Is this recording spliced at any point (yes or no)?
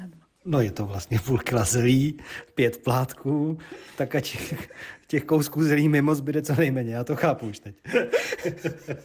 no